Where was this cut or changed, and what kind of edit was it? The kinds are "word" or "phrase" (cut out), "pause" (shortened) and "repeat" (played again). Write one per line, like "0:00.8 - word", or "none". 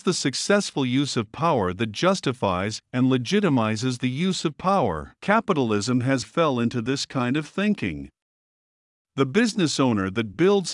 0:05.2 - pause
0:06.2 - word